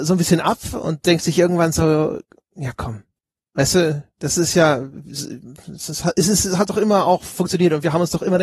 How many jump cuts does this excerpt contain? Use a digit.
0